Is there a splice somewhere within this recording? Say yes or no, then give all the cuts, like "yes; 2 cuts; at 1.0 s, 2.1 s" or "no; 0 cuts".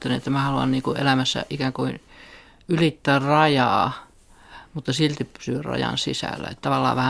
no; 0 cuts